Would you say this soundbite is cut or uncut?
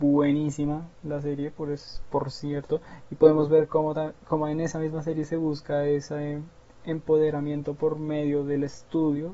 uncut